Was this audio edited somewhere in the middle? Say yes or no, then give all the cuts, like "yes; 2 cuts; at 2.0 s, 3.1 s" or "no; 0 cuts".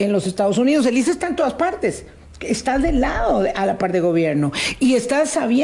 no; 0 cuts